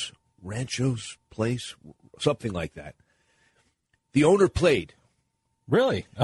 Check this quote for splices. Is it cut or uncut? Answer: uncut